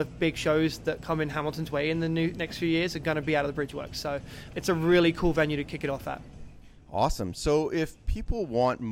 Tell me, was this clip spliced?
yes; 1 cut; at 4.5 s

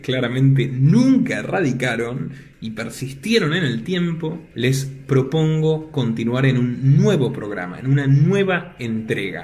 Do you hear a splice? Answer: no; 0 cuts

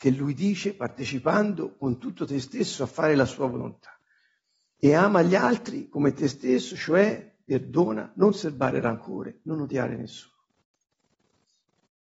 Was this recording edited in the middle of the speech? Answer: no; 0 cuts

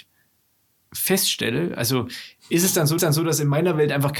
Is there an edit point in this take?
yes; 1 cut; at 3.0 s

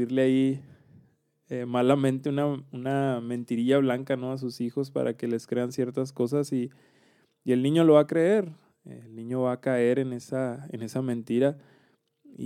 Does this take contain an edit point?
no; 0 cuts

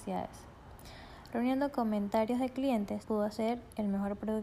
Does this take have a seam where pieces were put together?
yes; 1 cut; at 3.0 s

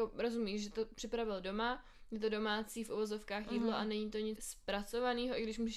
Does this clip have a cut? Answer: yes; 1 cut; at 4.3 s

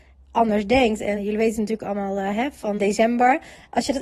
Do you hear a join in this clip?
yes; 2 cuts; at 1.2 s, 2.8 s

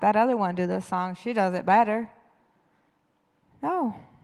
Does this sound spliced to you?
no; 0 cuts

